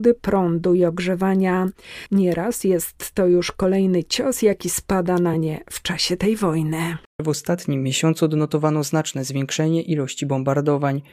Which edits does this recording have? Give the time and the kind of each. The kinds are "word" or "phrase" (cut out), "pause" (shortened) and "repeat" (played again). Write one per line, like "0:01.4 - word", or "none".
none